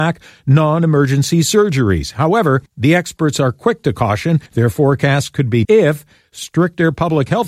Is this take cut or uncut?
cut